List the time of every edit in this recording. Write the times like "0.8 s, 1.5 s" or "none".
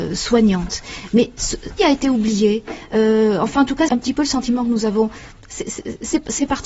1.8 s, 3.9 s

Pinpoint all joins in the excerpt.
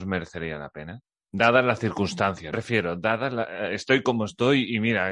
2.5 s

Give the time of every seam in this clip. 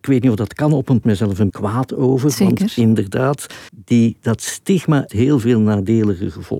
1.0 s, 1.5 s, 3.7 s, 5.1 s

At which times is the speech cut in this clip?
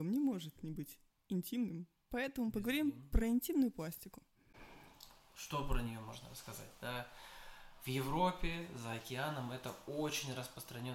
none

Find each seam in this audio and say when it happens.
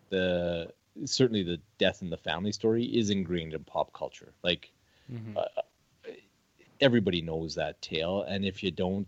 none

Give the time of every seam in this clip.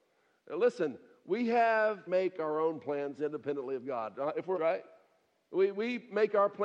2.1 s, 3.2 s, 4.5 s

